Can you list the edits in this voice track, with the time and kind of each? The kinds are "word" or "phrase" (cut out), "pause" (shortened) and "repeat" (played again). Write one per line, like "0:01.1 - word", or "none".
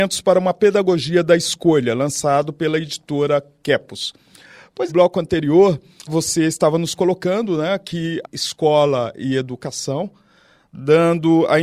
0:04.9 - phrase
0:06.1 - word
0:08.2 - phrase